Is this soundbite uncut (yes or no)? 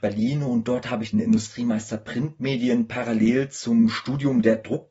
no